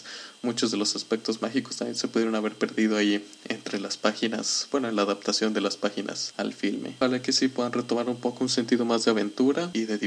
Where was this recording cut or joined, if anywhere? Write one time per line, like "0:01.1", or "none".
none

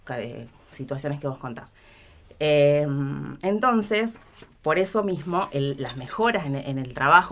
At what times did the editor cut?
none

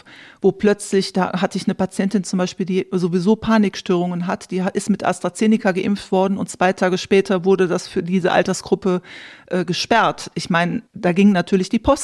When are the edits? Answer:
0:10.9

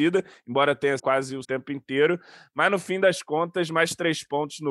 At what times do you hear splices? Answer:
0:01.0
0:01.4

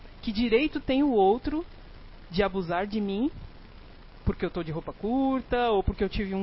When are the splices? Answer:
none

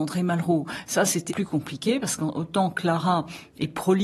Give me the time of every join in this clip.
0:01.3

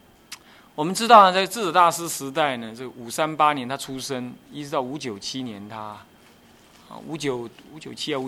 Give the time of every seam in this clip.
none

